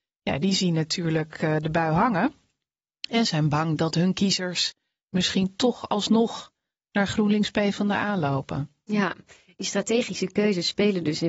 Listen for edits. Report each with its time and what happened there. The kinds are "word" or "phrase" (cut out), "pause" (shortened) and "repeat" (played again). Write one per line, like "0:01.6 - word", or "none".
none